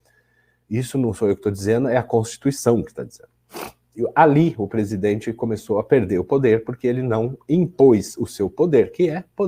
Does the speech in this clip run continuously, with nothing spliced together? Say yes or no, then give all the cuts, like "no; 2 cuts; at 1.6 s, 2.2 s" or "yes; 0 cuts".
yes; 0 cuts